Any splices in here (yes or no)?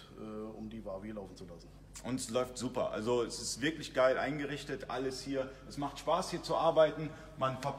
no